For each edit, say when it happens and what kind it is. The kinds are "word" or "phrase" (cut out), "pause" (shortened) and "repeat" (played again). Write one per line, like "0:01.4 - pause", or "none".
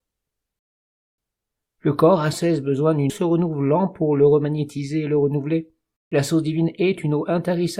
0:02.3 - word
0:03.1 - word
0:06.0 - pause